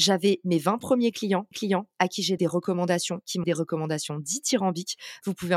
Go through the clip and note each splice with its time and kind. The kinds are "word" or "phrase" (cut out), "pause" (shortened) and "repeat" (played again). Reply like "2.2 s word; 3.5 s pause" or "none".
1.5 s repeat; 2.4 s word; 3.4 s word